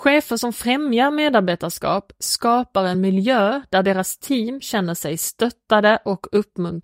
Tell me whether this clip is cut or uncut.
uncut